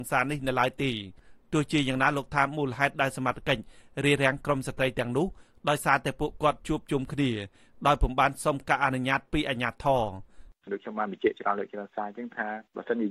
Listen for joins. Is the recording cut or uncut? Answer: uncut